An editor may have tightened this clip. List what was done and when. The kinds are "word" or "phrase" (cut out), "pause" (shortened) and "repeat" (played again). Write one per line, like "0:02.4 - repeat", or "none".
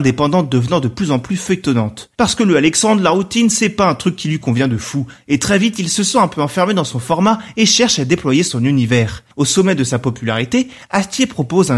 none